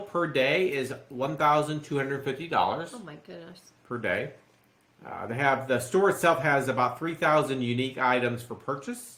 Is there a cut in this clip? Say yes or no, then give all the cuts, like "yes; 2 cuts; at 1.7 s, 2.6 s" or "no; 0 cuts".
no; 0 cuts